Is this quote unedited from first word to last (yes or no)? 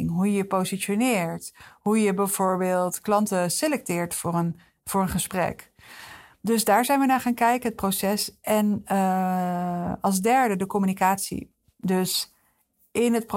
yes